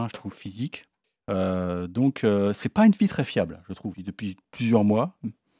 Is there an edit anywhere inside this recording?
yes; 2 cuts; at 1.0 s, 3.9 s

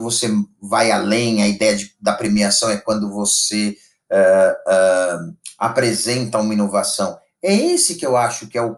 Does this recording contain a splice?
no; 0 cuts

